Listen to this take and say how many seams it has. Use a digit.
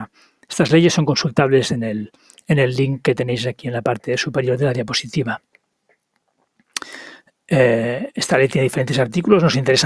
0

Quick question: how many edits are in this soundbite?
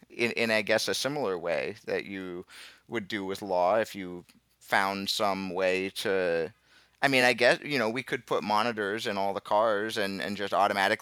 0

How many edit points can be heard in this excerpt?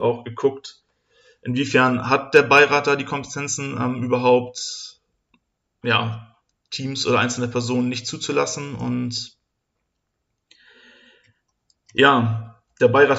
0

